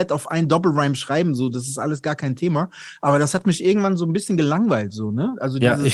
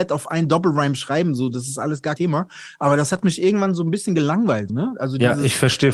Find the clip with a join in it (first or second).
second